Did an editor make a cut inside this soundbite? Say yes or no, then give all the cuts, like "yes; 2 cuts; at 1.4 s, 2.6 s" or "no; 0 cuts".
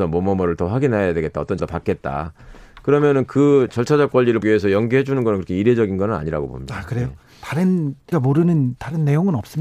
yes; 3 cuts; at 1.6 s, 4.4 s, 8.1 s